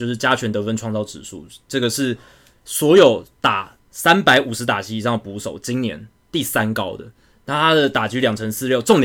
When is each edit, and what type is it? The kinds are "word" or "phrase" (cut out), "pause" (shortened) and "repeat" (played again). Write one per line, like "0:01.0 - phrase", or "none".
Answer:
none